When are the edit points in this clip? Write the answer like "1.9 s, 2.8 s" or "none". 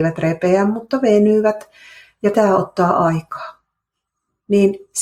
2.3 s